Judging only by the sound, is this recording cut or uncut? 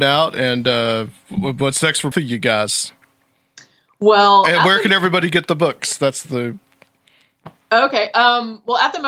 cut